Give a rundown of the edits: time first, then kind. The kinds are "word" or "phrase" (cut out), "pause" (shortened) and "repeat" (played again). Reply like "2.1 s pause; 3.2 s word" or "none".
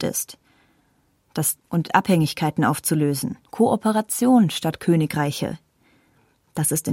1.6 s phrase; 3.5 s pause